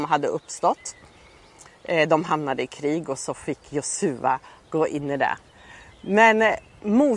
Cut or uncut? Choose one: uncut